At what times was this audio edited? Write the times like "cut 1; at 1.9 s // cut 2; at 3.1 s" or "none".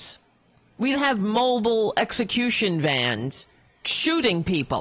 cut 1; at 0.9 s // cut 2; at 3.8 s